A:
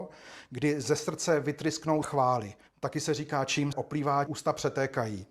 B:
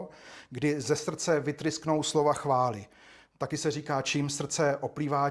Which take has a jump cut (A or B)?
A